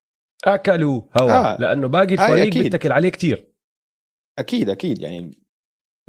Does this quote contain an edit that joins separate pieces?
no; 0 cuts

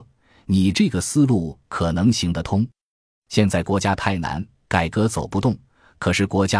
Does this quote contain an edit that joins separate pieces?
no; 0 cuts

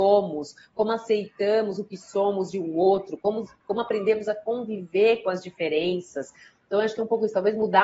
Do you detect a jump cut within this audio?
no; 0 cuts

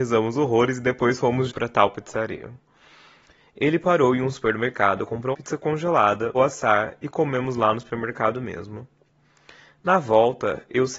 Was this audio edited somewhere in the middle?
yes; 3 cuts; at 1.5 s, 5.3 s, 6.3 s

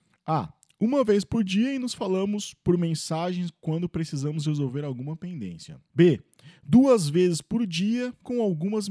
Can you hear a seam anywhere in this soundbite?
no; 0 cuts

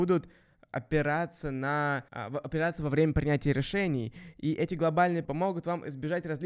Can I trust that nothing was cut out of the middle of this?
no; 2 cuts; at 2.1 s, 5.2 s

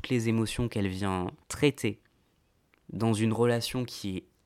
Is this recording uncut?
no; 1 cut; at 1.4 s

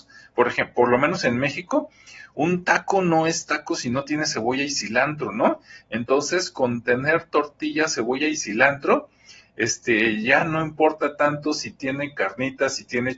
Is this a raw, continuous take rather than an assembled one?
yes; 0 cuts

